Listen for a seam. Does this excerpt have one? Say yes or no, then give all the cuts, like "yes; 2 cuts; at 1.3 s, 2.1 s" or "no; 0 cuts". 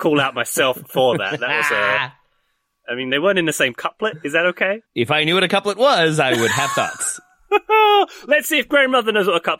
yes; 1 cut; at 4.9 s